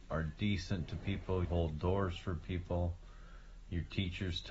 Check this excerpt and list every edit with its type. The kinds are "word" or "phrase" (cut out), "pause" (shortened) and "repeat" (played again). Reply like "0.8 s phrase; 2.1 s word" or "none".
1.4 s word